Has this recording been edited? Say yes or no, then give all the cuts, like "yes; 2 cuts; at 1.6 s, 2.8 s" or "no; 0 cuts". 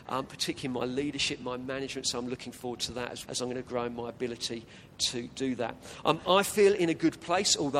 yes; 1 cut; at 3.3 s